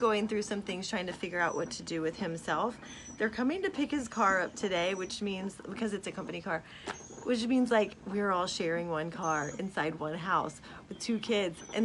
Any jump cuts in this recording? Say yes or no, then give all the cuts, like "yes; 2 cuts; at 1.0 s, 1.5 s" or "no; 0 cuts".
no; 0 cuts